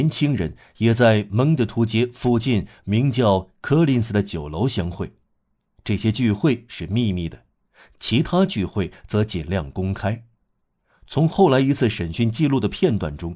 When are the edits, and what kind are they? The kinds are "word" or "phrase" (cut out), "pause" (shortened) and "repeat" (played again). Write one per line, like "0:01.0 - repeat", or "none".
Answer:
none